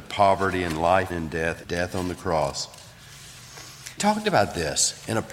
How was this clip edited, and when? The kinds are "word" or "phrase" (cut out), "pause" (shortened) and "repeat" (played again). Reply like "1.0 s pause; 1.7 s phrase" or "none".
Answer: 1.1 s word; 1.6 s word; 4.0 s word